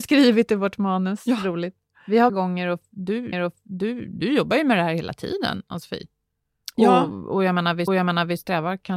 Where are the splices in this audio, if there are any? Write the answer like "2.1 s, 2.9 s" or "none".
2.3 s, 3.3 s, 7.9 s